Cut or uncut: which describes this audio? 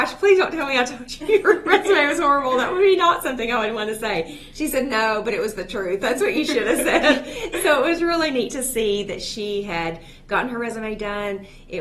uncut